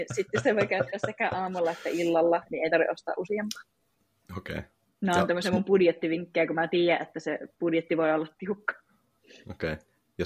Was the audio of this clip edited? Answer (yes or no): no